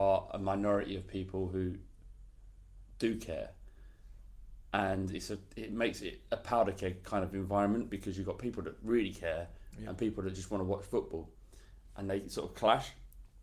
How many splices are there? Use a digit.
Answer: 0